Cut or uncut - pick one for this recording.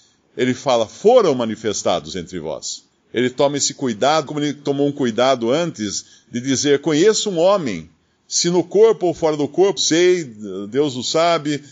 cut